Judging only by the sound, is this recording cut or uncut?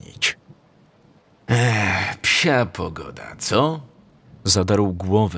uncut